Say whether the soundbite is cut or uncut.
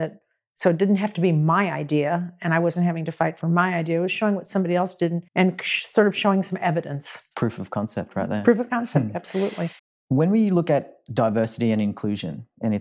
cut